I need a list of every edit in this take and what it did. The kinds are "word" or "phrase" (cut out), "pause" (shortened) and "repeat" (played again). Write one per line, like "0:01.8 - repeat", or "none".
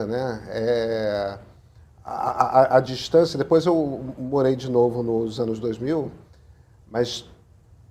none